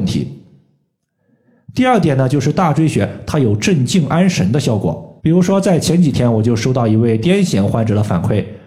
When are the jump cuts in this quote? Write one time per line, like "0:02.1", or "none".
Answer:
0:05.2